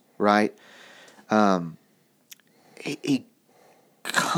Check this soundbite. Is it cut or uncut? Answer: uncut